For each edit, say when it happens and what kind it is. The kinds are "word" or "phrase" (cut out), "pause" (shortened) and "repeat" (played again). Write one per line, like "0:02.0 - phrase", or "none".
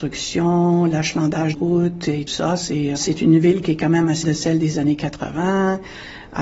0:01.5 - word
0:02.3 - word
0:03.0 - word
0:04.2 - word